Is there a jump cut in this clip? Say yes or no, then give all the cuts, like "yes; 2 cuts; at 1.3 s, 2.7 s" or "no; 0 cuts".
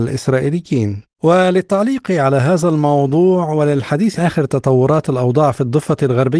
yes; 2 cuts; at 1.1 s, 4.2 s